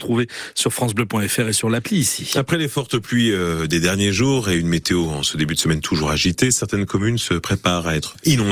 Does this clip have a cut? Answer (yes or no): no